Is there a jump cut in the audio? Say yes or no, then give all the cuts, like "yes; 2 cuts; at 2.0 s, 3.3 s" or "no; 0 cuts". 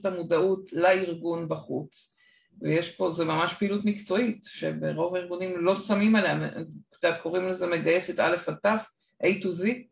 no; 0 cuts